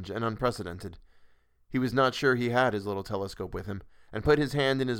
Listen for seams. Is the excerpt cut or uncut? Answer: uncut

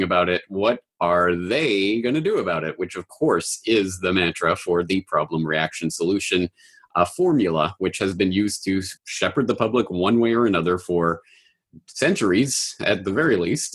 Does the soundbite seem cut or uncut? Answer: cut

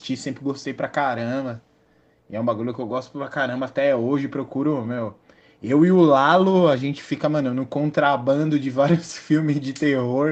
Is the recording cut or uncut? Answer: uncut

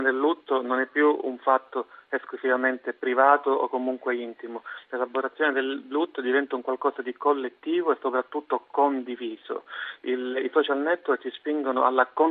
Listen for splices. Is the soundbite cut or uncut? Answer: uncut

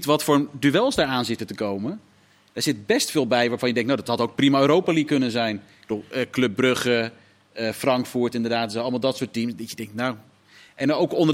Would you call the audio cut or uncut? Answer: uncut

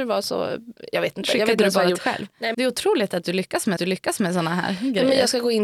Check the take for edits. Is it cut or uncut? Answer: cut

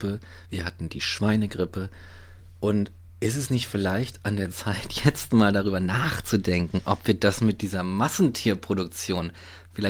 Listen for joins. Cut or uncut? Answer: uncut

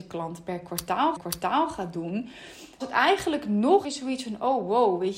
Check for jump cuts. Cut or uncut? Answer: cut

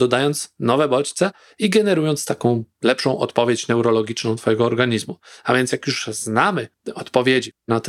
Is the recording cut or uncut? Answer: uncut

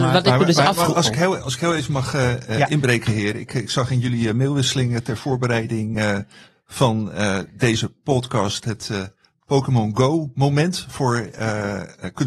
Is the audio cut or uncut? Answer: uncut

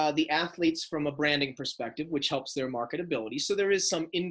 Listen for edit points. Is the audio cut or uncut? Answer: uncut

